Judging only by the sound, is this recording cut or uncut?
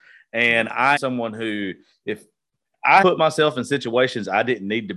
cut